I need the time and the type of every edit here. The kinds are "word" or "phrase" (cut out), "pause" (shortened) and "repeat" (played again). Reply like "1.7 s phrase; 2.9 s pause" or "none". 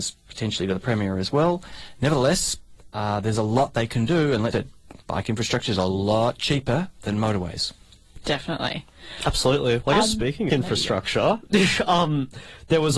2.9 s pause; 4.5 s word; 5.0 s pause; 10.5 s phrase